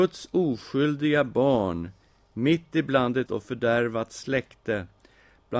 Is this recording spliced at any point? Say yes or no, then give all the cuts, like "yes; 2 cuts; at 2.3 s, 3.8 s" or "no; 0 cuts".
yes; 1 cut; at 3.3 s